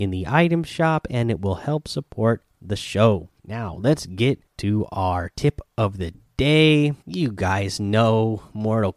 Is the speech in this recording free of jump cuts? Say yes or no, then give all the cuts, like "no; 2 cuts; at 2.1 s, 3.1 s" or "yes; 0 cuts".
no; 3 cuts; at 3.4 s, 4.5 s, 7.0 s